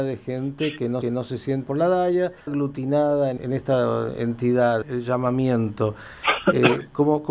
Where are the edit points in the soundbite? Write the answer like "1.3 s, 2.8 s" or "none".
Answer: 1.0 s, 1.7 s, 2.5 s, 3.4 s, 4.8 s